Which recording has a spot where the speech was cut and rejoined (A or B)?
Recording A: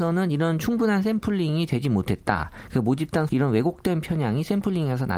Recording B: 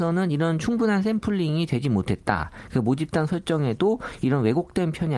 A